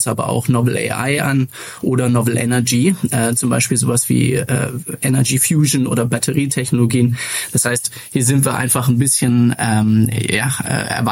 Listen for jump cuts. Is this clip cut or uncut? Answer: uncut